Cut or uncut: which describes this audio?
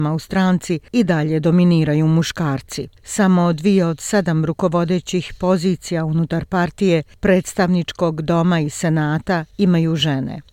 uncut